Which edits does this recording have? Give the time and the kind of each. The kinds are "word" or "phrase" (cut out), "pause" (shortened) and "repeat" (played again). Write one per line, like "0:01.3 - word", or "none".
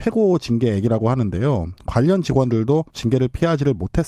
0:02.9 - pause